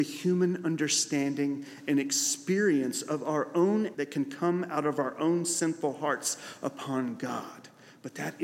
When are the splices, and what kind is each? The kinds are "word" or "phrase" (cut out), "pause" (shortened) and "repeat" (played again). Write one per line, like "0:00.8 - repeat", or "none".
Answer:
0:03.9 - word